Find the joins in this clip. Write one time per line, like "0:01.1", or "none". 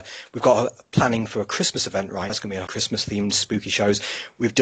0:02.3
0:02.7

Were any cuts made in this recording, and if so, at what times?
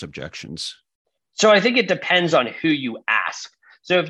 none

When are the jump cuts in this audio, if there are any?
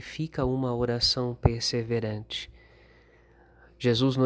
none

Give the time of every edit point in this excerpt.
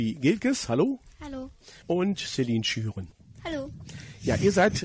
0:01.8

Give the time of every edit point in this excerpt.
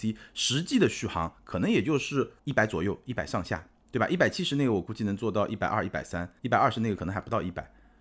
0:02.4
0:06.4

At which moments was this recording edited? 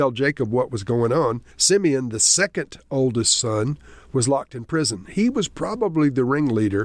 0:01.5

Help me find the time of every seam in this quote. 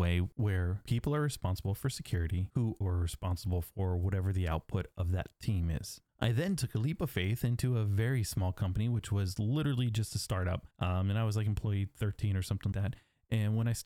0:02.8
0:06.1
0:10.7
0:12.7

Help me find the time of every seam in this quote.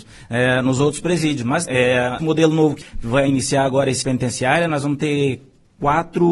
0:01.7
0:02.2
0:02.8
0:04.0

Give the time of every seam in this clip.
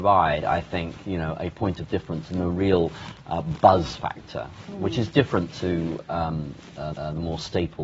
0:06.9

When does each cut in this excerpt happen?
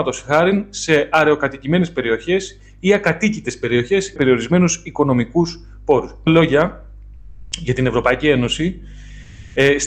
0:04.2
0:06.3

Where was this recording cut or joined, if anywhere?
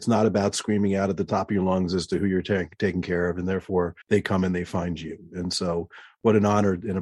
0:04.0

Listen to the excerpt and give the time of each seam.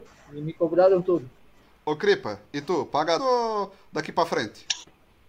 0:03.2

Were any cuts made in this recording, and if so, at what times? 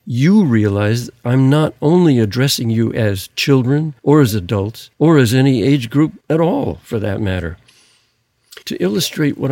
0:04.0
0:04.9
0:06.2
0:08.6

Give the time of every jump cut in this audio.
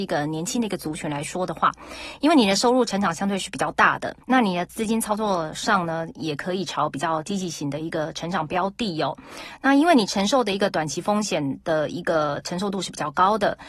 0:04.2

